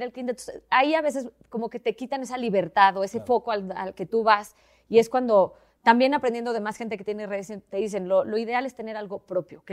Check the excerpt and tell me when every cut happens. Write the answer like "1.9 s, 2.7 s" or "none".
none